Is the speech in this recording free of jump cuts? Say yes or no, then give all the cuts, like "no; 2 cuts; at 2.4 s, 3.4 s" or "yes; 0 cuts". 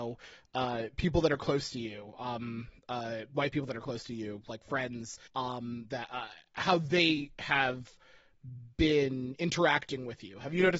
no; 1 cut; at 5.3 s